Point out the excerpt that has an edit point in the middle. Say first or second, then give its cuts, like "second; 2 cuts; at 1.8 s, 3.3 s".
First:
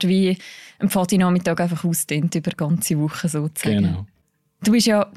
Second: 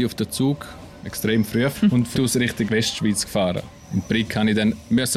second; 2 cuts; at 1.7 s, 2.1 s